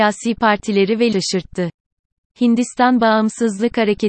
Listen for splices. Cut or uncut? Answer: cut